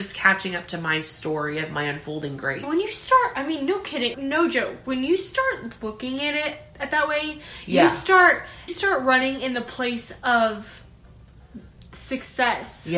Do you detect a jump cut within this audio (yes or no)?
yes